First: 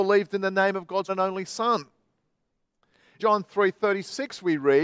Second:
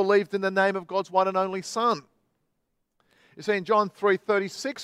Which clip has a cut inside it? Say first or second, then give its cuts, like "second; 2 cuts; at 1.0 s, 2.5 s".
first; 2 cuts; at 1.1 s, 3.2 s